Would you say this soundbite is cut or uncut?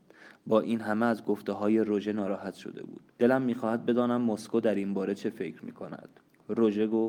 cut